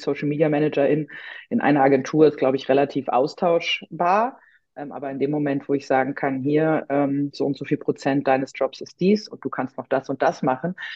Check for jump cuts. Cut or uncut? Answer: uncut